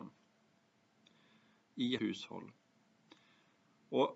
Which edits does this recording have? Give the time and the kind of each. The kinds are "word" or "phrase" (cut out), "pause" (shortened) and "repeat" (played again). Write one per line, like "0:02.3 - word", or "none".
0:02.0 - word